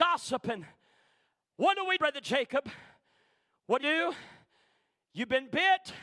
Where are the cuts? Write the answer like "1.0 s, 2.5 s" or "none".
2.0 s, 3.8 s